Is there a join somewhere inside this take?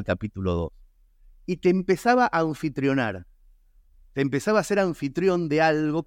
no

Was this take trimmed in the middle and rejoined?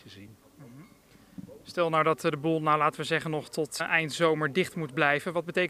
yes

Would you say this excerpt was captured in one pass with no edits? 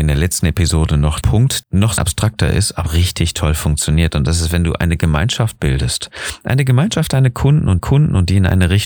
no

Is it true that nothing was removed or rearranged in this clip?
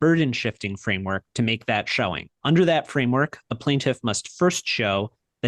no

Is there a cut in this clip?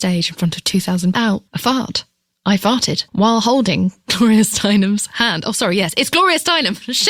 yes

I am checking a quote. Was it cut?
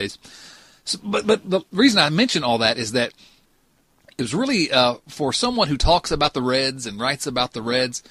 no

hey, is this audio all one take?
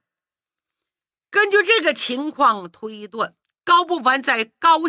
no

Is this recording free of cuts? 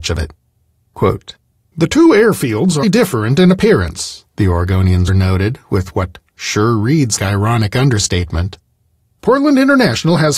no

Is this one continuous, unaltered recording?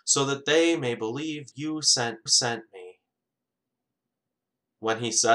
no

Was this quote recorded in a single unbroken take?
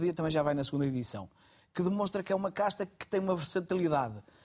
yes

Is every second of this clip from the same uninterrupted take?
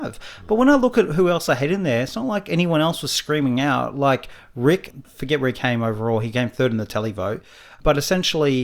yes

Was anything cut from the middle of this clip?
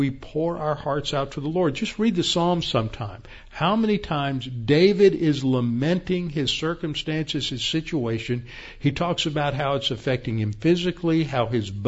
no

